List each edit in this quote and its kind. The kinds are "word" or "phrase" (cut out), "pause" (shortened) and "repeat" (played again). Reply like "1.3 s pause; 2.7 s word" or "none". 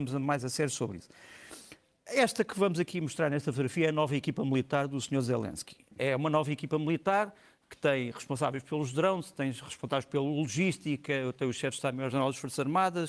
none